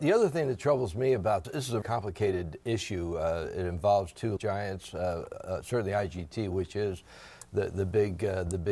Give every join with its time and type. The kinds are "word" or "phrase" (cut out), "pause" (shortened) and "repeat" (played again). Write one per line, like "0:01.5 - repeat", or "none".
0:01.4 - word
0:01.8 - word
0:04.4 - word